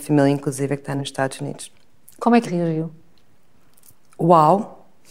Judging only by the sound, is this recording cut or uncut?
cut